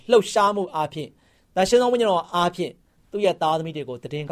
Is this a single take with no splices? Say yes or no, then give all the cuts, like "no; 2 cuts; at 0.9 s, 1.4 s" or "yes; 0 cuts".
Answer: yes; 0 cuts